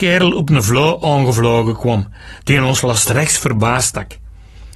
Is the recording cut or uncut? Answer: uncut